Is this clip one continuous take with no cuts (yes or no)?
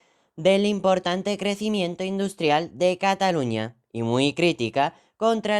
yes